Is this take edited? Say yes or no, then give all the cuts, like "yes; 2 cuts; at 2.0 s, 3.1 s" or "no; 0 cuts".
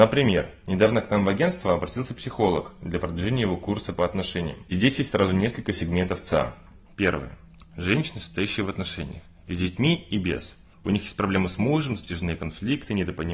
no; 0 cuts